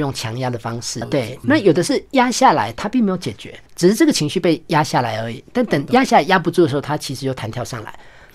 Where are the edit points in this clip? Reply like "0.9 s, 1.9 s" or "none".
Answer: 1.0 s, 1.4 s, 3.7 s